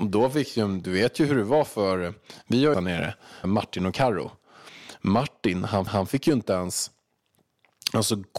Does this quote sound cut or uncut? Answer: cut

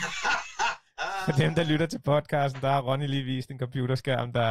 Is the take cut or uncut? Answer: uncut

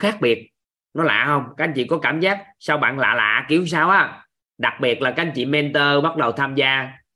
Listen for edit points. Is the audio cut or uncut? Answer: uncut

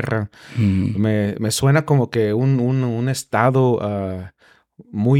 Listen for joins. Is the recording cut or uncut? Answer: uncut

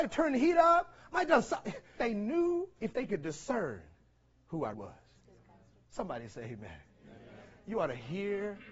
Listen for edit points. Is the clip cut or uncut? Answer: cut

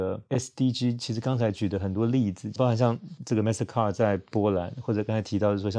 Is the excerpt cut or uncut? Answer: uncut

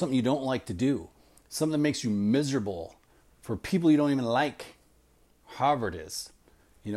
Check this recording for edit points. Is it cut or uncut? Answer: uncut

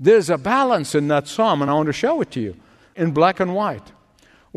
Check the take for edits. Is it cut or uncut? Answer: uncut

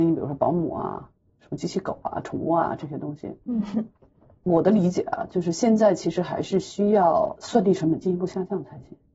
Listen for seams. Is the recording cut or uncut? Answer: uncut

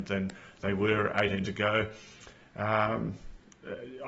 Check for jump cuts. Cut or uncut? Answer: cut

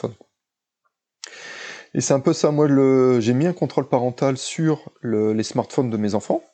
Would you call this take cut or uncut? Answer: uncut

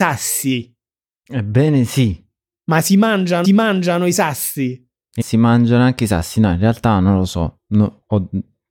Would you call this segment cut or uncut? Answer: cut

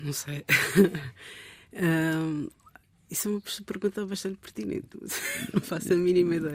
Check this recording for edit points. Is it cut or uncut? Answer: uncut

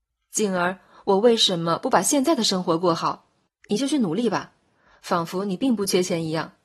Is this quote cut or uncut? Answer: cut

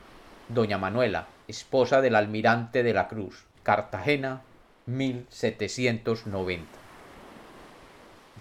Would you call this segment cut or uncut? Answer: cut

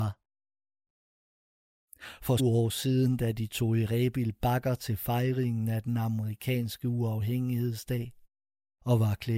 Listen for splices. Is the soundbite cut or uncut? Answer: cut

